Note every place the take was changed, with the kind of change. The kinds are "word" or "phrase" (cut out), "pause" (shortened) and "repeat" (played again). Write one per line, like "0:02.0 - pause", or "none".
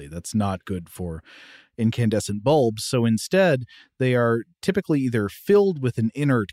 none